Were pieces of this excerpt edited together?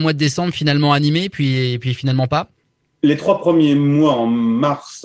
no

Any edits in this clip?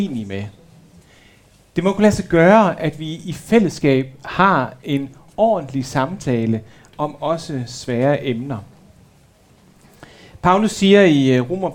no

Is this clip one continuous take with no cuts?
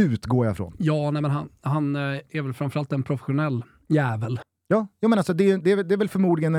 yes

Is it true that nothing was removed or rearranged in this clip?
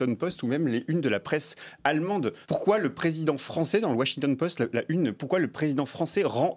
no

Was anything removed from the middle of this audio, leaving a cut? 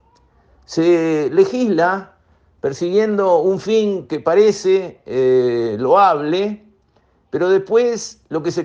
no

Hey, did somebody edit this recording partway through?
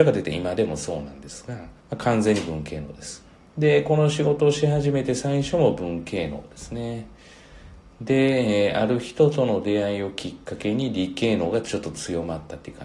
yes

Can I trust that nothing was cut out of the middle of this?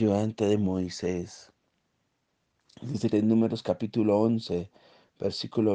no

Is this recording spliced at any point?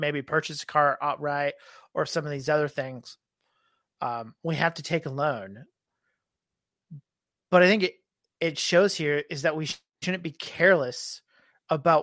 no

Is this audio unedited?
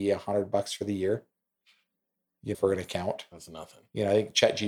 no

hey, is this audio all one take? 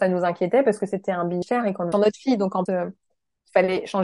no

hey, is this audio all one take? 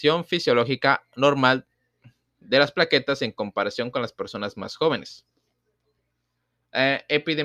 yes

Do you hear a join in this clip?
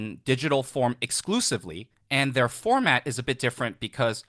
yes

